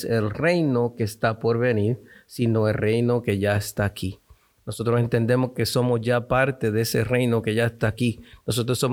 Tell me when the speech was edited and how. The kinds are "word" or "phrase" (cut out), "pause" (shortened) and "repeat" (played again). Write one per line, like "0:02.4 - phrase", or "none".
none